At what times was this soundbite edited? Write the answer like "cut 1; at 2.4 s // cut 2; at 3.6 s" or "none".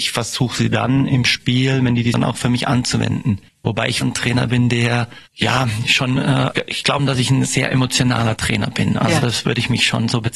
cut 1; at 2.1 s // cut 2; at 3.5 s // cut 3; at 4.0 s // cut 4; at 5.3 s // cut 5; at 7.0 s

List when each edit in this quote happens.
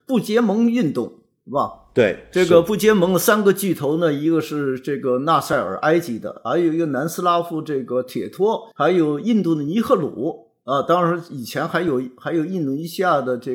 cut 1; at 8.7 s

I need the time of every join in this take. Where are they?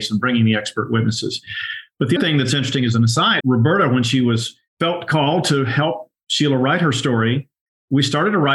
cut 1; at 2.2 s // cut 2; at 3.4 s // cut 3; at 4.7 s

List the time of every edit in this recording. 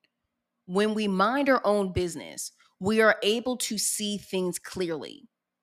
none

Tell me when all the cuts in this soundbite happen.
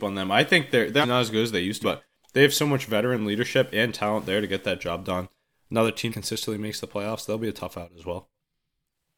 cut 1; at 1.0 s // cut 2; at 1.8 s // cut 3; at 6.1 s

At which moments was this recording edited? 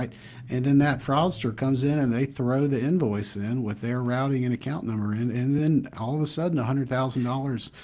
none

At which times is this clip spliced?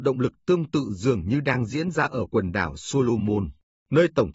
none

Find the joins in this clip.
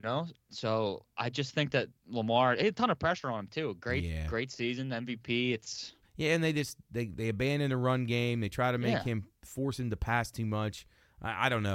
cut 1; at 6.0 s

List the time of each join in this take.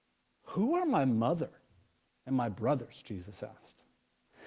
none

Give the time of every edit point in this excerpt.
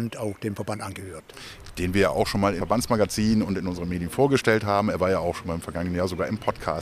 cut 1; at 2.6 s

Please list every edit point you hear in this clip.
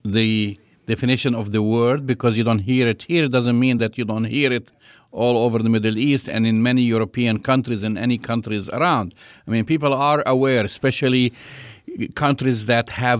none

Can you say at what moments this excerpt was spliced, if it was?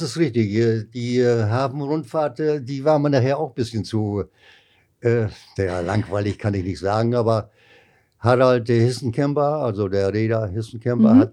none

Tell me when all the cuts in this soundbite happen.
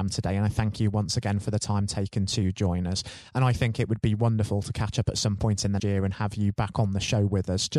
cut 1; at 5.8 s

